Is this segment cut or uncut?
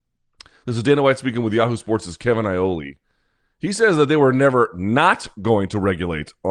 uncut